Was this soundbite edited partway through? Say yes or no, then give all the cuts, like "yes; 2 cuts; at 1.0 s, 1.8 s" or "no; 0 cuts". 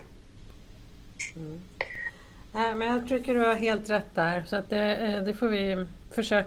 no; 0 cuts